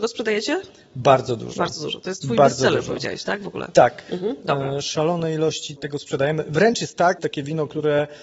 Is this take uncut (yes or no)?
no